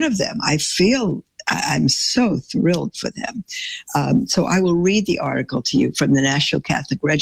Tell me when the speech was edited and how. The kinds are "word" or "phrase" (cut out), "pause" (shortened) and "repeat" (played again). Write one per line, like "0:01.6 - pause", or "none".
none